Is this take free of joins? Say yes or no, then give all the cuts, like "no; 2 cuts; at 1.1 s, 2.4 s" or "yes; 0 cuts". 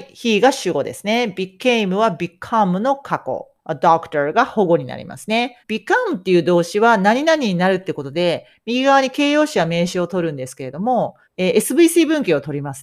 no; 3 cuts; at 3.6 s, 5.6 s, 11.2 s